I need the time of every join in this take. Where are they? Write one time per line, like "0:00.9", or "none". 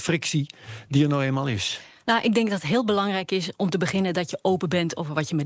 none